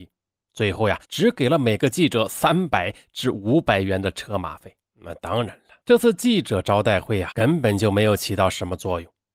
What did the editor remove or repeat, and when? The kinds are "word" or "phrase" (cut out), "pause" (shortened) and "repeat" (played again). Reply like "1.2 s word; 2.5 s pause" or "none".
1.0 s pause; 4.8 s pause; 5.8 s pause; 7.3 s word

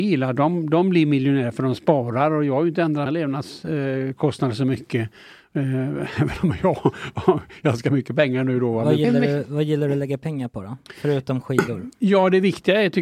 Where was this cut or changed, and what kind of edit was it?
3.1 s word

